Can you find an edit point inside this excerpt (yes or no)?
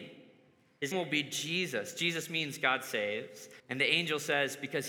yes